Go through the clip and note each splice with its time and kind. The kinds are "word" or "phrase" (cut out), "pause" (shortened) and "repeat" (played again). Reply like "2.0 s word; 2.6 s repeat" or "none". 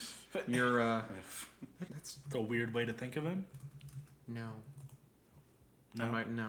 1.9 s word; 2.2 s word